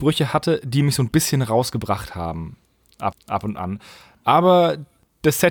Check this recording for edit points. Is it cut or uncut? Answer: cut